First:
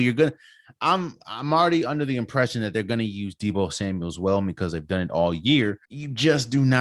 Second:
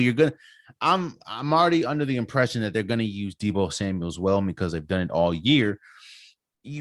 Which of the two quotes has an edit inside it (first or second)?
first